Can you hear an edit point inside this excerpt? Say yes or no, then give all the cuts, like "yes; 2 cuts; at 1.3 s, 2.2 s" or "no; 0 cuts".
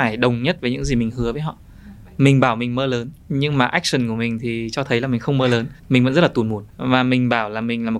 yes; 3 cuts; at 3.2 s, 5.8 s, 6.7 s